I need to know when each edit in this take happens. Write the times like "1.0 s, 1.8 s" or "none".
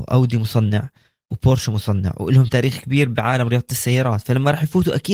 none